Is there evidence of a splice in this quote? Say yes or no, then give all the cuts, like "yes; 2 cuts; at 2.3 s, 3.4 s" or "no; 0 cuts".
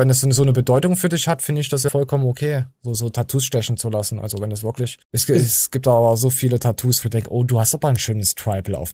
yes; 3 cuts; at 1.9 s, 5.0 s, 7.0 s